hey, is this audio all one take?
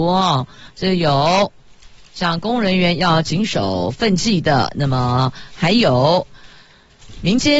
yes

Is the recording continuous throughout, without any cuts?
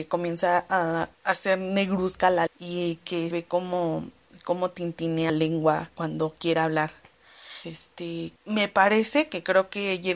no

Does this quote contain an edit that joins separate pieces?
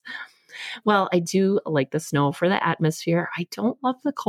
no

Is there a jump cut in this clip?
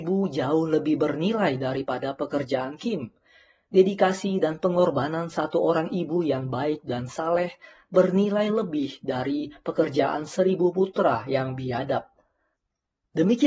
no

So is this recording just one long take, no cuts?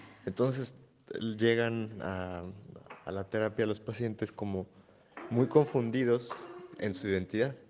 yes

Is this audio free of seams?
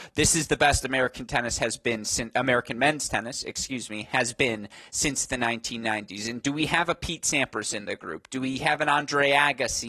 yes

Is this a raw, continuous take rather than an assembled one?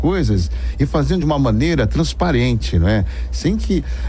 yes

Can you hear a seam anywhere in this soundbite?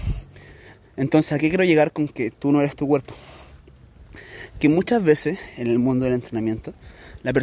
no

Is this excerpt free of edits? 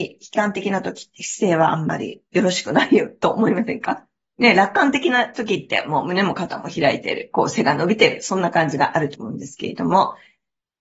no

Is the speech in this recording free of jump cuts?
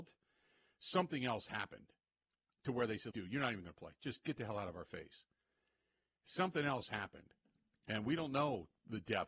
no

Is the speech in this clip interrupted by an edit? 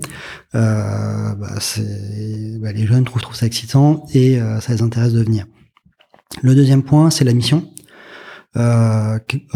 yes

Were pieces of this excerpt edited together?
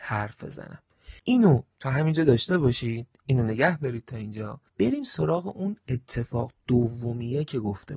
yes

